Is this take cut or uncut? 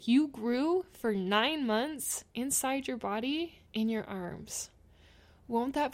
cut